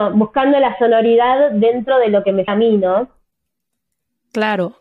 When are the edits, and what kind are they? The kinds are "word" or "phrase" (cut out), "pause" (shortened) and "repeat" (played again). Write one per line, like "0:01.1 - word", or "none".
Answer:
0:02.5 - word